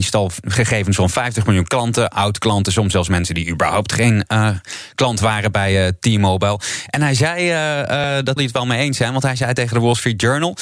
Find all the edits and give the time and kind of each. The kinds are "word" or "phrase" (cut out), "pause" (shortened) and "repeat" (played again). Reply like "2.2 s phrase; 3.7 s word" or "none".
8.4 s phrase